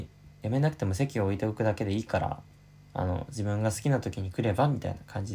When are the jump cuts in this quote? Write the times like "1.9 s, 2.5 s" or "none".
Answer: 2.6 s